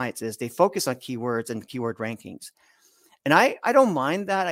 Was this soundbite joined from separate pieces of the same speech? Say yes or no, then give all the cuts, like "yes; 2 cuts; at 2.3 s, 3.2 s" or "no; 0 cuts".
no; 0 cuts